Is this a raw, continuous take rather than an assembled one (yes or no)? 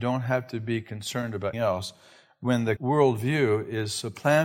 no